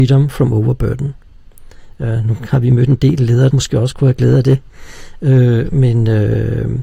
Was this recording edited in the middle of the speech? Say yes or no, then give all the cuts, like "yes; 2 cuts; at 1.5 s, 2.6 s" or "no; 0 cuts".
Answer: yes; 1 cut; at 3.5 s